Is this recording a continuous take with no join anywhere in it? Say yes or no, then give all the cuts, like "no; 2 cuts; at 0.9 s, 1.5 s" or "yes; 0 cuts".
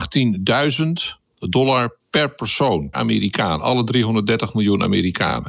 no; 2 cuts; at 2.0 s, 2.9 s